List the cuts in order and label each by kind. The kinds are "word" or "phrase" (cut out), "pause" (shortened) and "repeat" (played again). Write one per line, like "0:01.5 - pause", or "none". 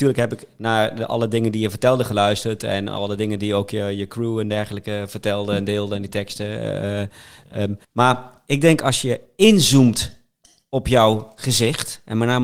0:07.8 - pause